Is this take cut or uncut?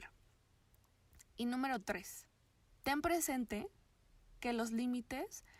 uncut